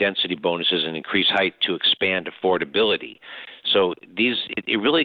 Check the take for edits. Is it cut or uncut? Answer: uncut